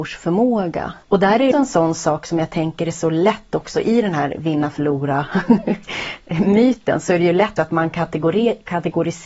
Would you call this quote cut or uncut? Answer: cut